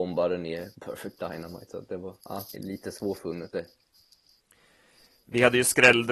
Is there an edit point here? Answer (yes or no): yes